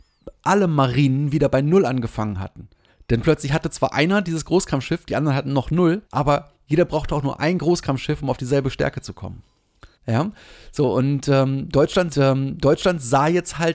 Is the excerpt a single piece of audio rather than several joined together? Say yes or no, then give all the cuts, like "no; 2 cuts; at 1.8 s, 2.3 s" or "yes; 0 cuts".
no; 4 cuts; at 2.9 s, 6.0 s, 9.9 s, 12.1 s